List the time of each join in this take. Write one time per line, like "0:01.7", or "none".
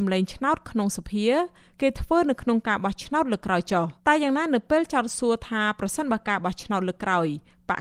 0:04.0